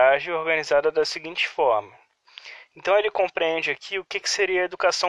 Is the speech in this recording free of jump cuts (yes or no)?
yes